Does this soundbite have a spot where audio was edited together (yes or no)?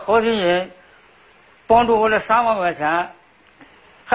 no